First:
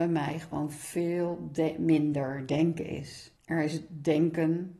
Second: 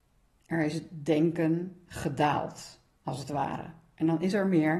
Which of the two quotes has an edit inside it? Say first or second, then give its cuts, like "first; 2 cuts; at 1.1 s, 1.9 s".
first; 1 cut; at 3.4 s